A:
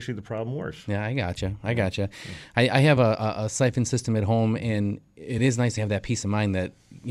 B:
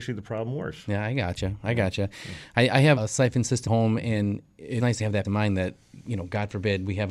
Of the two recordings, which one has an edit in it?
B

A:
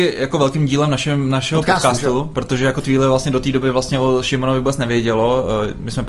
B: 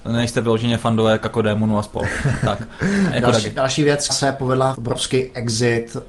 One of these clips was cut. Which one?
B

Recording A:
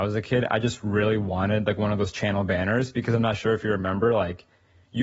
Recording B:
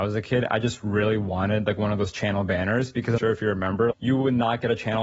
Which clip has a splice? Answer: B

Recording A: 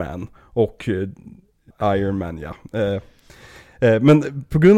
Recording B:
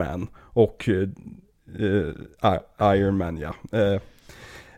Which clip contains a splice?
A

